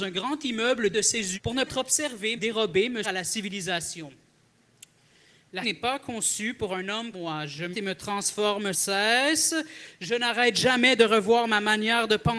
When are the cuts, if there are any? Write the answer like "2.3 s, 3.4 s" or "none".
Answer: 0.9 s, 1.3 s, 1.7 s, 2.4 s, 3.0 s, 5.6 s, 7.1 s, 7.7 s, 8.7 s